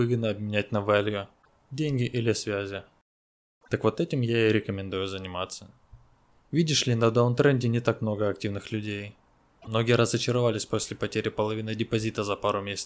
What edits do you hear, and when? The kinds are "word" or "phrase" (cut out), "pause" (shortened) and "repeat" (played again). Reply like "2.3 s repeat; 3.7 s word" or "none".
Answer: none